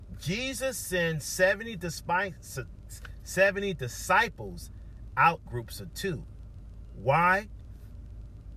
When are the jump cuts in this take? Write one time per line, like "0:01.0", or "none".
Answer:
0:05.5